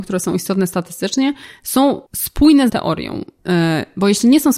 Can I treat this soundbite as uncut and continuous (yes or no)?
no